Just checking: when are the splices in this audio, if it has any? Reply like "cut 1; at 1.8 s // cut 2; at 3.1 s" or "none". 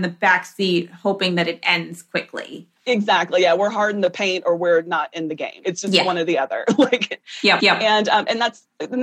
cut 1; at 5.6 s // cut 2; at 7.6 s